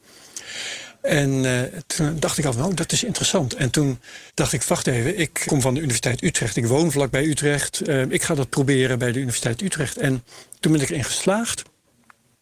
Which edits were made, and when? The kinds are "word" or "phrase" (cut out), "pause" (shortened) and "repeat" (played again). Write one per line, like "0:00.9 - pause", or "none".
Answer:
0:04.3 - pause
0:05.5 - word